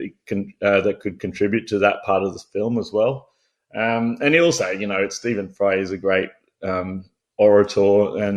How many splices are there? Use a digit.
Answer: 0